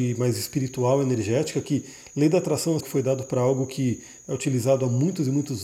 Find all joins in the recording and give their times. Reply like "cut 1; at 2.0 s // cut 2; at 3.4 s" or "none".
cut 1; at 2.8 s